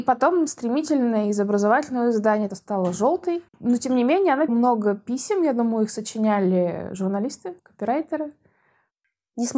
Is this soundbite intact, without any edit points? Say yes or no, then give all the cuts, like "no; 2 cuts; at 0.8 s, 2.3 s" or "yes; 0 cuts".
no; 4 cuts; at 2.5 s, 3.5 s, 4.5 s, 7.6 s